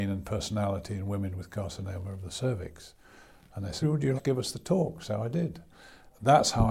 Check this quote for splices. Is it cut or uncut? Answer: cut